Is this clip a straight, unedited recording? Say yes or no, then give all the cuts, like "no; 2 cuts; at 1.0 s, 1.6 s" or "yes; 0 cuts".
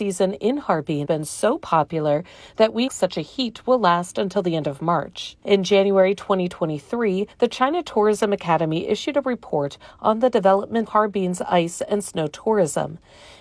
no; 5 cuts; at 1.0 s, 2.9 s, 5.4 s, 7.3 s, 10.9 s